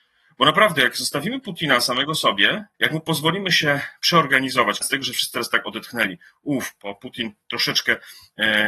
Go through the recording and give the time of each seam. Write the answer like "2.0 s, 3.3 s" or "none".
2.7 s, 4.8 s